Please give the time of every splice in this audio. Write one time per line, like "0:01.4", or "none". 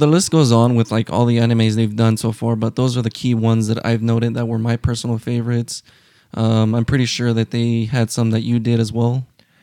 none